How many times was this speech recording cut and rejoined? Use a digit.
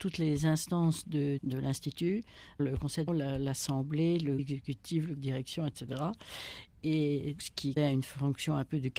7